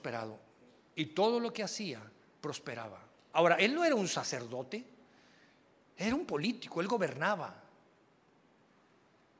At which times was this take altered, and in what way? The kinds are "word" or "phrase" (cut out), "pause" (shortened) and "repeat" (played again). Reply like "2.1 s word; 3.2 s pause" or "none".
none